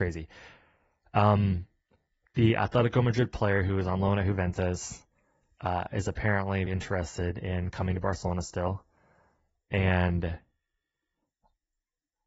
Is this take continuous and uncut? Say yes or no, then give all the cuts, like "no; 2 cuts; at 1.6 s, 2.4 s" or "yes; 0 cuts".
no; 1 cut; at 6.7 s